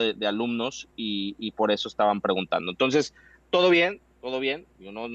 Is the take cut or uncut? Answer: uncut